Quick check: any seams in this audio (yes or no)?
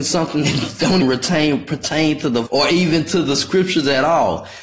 yes